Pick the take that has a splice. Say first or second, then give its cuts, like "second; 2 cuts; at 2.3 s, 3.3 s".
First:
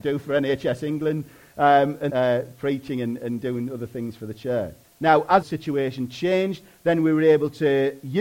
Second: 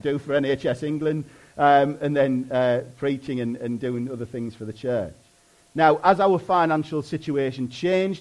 first; 3 cuts; at 2.1 s, 4.8 s, 5.4 s